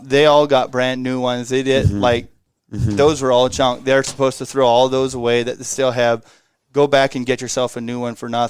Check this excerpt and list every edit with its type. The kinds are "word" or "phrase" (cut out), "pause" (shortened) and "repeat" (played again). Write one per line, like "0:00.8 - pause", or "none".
none